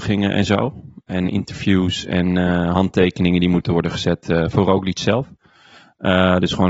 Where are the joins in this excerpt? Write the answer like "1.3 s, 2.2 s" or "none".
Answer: none